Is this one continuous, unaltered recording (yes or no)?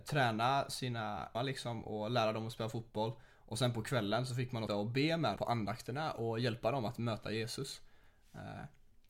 no